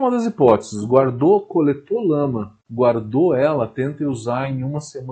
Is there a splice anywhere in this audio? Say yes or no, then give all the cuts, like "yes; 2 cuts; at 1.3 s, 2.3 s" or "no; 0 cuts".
yes; 1 cut; at 2.6 s